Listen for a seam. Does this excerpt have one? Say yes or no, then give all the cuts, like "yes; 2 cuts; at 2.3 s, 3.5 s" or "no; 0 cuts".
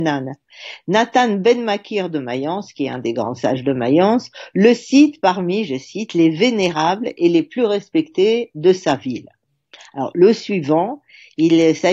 no; 0 cuts